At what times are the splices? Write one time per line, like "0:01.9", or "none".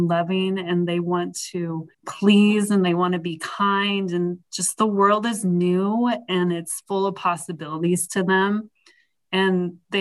0:01.9